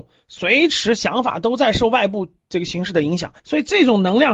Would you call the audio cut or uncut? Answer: cut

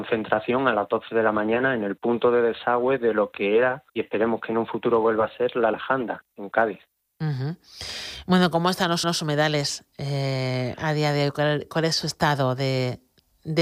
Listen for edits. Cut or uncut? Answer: cut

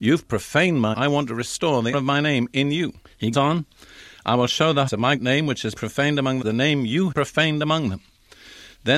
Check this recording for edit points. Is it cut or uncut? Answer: cut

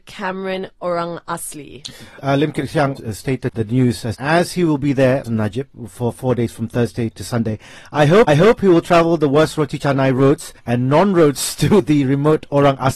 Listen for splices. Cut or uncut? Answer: cut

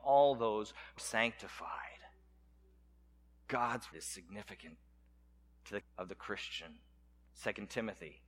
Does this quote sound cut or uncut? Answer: cut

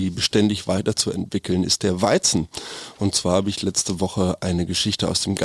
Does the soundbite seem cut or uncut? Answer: uncut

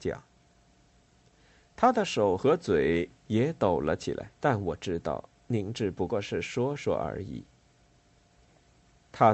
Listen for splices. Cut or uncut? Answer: cut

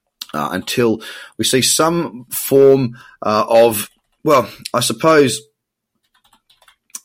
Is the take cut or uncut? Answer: uncut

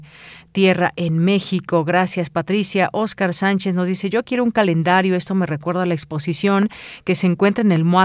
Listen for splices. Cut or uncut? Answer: uncut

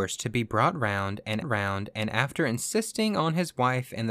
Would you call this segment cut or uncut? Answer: cut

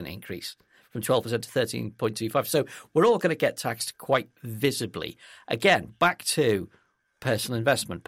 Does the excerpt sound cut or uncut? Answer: uncut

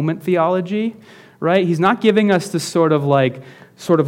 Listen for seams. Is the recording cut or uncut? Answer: uncut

